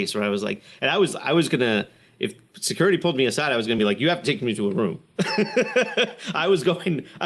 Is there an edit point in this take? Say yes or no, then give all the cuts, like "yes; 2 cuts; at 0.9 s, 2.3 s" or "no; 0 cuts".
no; 0 cuts